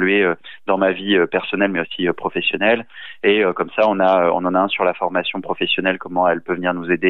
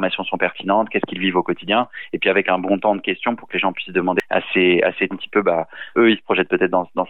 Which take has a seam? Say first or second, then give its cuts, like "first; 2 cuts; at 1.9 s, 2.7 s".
second; 2 cuts; at 5.1 s, 5.9 s